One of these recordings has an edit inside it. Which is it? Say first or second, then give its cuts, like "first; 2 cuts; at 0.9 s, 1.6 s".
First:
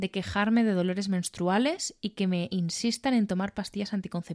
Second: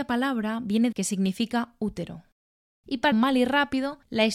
second; 2 cuts; at 0.9 s, 3.1 s